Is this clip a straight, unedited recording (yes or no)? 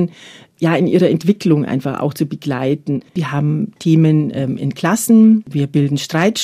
yes